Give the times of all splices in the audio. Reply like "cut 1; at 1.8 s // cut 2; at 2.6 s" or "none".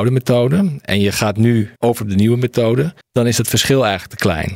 cut 1; at 1.8 s // cut 2; at 3.0 s